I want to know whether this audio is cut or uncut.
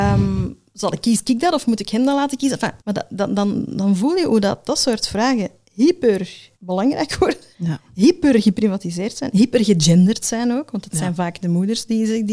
cut